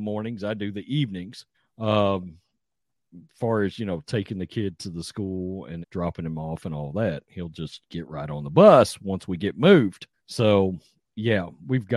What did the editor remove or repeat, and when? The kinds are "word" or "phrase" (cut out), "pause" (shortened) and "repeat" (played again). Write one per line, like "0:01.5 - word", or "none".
0:01.5 - pause
0:05.8 - word
0:10.1 - pause